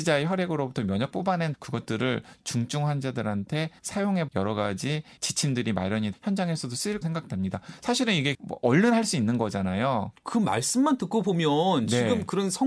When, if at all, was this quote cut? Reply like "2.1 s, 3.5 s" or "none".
1.1 s, 1.5 s, 3.8 s, 4.3 s, 5.2 s, 6.1 s, 7.0 s, 8.3 s